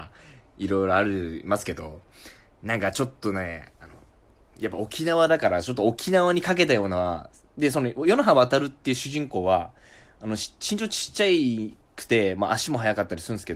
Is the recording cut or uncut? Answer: uncut